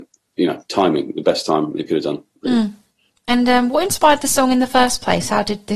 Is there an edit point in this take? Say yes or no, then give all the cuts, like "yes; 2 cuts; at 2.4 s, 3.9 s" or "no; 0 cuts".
no; 0 cuts